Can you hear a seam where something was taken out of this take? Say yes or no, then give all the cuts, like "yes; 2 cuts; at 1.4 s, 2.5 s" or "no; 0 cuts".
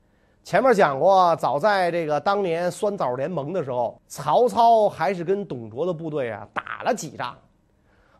yes; 1 cut; at 4.0 s